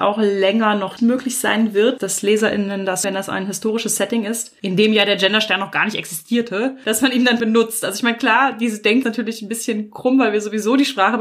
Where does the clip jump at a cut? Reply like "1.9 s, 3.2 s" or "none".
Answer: 1.0 s, 3.0 s, 7.4 s, 9.0 s